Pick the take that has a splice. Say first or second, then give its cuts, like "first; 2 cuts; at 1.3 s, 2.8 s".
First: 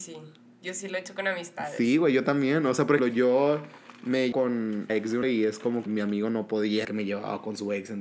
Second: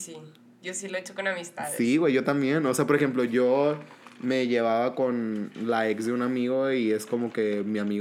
first; 6 cuts; at 3.0 s, 4.3 s, 4.9 s, 5.2 s, 5.9 s, 6.8 s